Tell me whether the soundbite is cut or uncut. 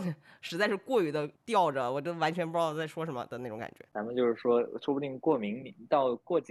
cut